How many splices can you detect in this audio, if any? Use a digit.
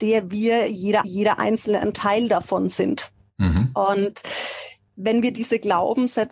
3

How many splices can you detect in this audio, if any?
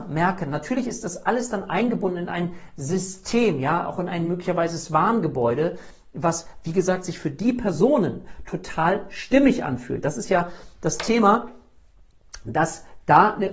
0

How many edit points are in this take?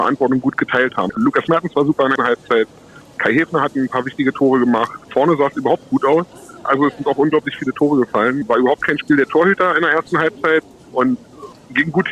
1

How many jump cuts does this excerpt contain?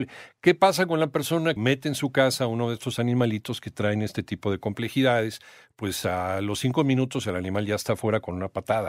1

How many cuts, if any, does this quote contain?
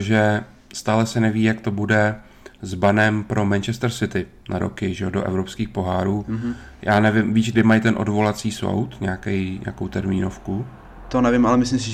1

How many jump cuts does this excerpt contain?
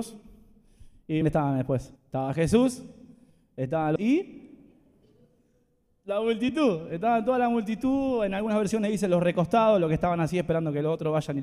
3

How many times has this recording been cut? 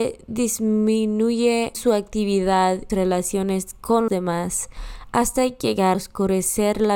4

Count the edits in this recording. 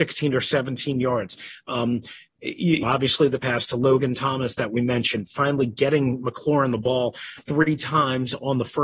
3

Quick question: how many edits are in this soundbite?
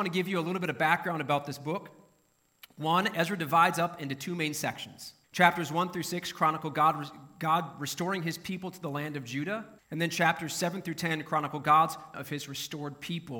3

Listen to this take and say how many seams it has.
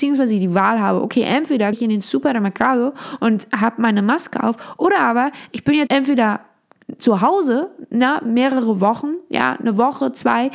2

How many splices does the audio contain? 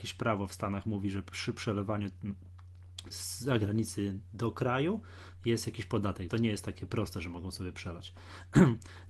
2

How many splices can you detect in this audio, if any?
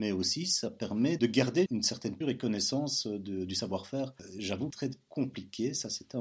4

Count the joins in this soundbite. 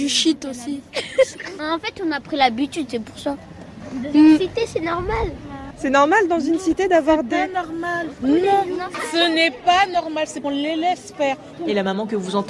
1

